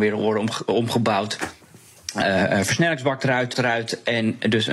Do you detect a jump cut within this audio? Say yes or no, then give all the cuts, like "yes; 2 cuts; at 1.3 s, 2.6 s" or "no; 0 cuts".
yes; 1 cut; at 3.5 s